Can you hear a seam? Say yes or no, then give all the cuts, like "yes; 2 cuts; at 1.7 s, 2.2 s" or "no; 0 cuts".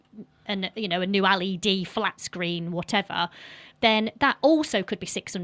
no; 0 cuts